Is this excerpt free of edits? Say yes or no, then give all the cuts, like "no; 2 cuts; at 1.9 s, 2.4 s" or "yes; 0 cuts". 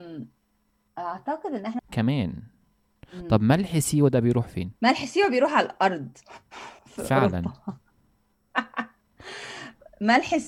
no; 3 cuts; at 1.8 s, 4.8 s, 6.8 s